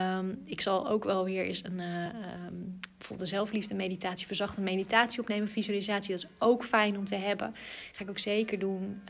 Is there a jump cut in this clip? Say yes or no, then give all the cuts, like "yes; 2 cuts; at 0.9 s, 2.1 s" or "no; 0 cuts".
no; 0 cuts